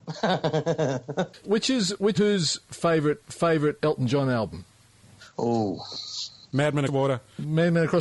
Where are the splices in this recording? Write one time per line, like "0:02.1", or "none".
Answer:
0:01.4
0:02.1
0:03.2
0:06.9